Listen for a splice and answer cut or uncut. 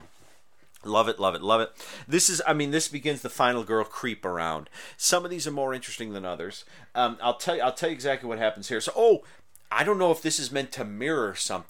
uncut